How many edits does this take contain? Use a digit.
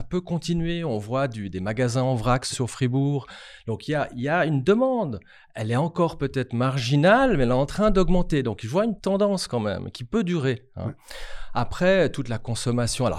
2